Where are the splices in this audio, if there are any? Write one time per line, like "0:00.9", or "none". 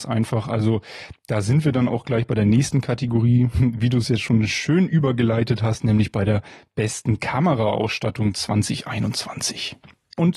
none